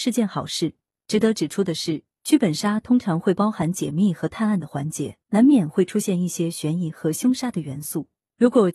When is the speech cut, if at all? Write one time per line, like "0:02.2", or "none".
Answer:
0:05.2

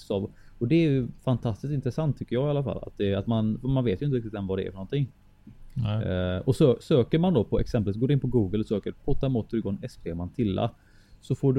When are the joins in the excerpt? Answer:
0:01.2

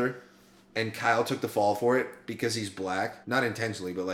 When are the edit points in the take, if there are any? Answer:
0:03.2

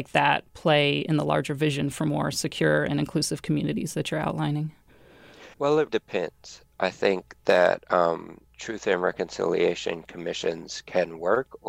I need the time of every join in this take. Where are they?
0:05.5
0:05.9
0:08.5

